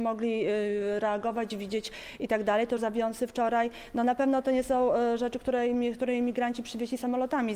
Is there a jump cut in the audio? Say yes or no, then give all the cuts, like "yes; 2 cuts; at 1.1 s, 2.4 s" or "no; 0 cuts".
yes; 1 cut; at 2.8 s